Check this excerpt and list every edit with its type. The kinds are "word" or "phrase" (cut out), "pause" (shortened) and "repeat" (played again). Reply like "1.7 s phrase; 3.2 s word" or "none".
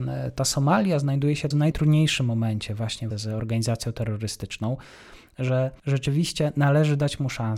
1.5 s word; 3.1 s word